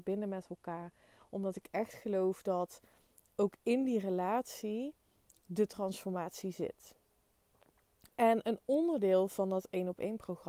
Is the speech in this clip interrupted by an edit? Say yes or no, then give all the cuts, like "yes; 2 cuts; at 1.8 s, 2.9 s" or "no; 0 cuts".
no; 0 cuts